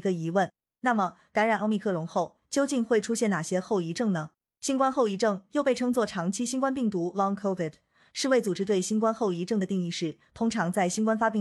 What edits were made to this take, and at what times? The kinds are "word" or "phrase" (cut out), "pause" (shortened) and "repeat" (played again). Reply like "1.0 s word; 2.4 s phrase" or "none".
none

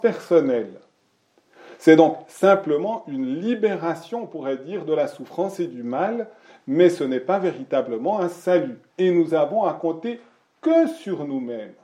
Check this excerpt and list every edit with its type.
8.9 s pause

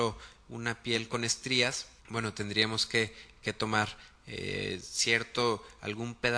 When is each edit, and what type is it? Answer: 2.0 s pause

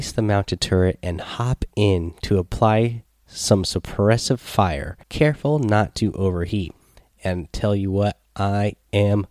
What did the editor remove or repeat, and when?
5.0 s pause

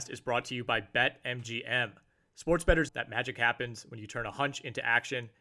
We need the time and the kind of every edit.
2.9 s word

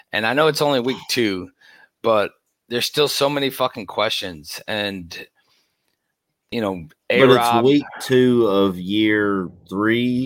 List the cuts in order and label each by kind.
none

